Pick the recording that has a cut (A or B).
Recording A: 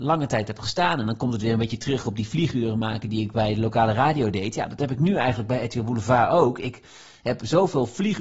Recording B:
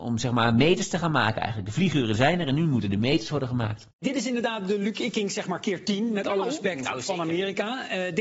B